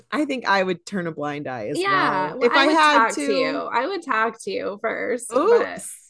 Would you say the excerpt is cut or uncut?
uncut